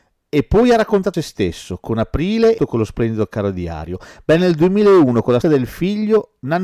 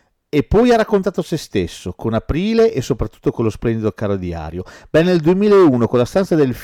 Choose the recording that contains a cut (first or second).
first